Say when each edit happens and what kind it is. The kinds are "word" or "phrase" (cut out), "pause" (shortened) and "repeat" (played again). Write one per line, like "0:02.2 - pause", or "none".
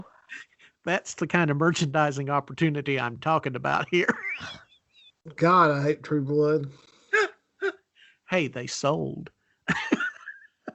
none

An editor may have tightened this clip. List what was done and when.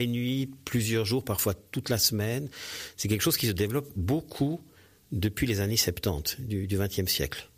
none

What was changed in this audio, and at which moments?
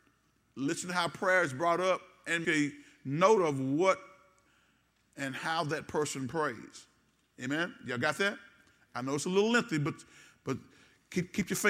0:02.4 - word

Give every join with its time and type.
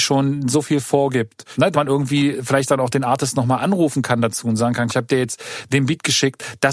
0:01.7 - word
0:04.9 - phrase

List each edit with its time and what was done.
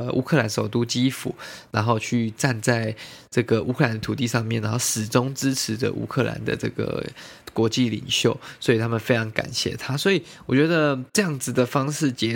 0:07.4 - pause
0:11.1 - pause

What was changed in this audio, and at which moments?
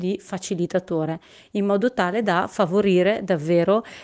none

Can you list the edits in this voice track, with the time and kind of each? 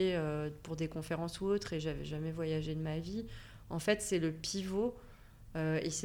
none

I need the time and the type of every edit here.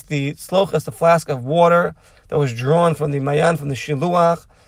none

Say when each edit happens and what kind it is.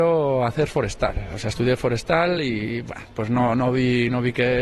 none

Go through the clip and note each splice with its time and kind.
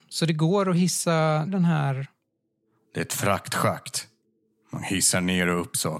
0:01.5 - word

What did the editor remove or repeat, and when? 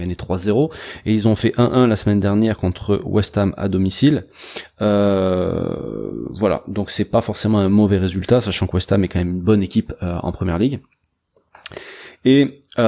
none

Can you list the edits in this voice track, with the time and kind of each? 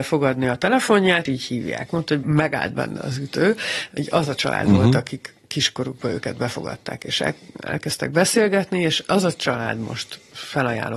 0:01.3 - phrase
0:02.2 - word

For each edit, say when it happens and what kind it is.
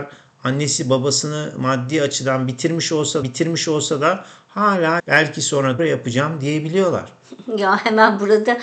0:03.2 - repeat
0:05.0 - phrase
0:05.8 - word

